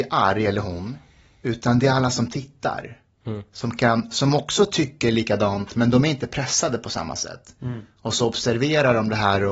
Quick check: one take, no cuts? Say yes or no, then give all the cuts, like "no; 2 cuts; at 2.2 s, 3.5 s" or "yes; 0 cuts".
yes; 0 cuts